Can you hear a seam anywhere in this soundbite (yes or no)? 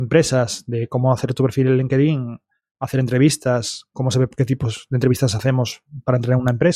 no